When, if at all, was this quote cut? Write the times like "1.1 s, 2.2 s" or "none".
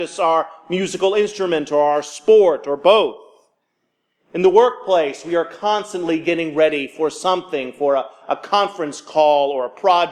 none